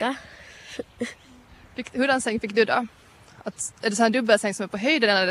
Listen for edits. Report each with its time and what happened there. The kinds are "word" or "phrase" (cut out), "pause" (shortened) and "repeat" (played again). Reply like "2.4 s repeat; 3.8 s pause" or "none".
none